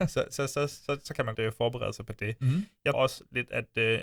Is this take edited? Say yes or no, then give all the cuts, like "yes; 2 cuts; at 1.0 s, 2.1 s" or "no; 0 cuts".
yes; 2 cuts; at 1.3 s, 2.9 s